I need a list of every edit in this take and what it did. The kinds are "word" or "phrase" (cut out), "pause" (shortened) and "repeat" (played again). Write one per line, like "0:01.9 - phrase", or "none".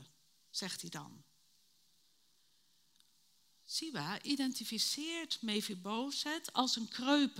none